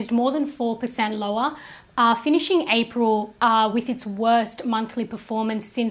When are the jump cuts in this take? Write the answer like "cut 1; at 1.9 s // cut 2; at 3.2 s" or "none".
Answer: none